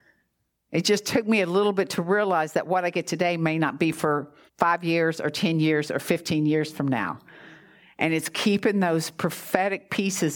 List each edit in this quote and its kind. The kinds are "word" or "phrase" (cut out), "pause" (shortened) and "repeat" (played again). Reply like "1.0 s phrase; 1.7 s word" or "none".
4.5 s pause